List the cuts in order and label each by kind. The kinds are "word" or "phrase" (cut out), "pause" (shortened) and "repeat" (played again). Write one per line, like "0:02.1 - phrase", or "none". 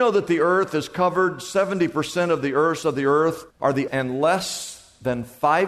0:02.8 - word
0:03.5 - pause
0:03.9 - word

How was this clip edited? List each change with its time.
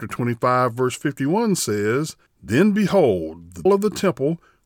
0:02.3 - pause
0:03.7 - word

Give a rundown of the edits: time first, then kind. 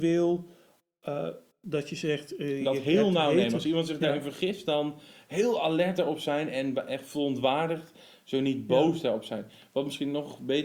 none

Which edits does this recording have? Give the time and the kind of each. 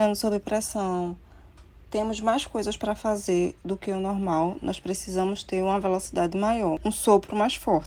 none

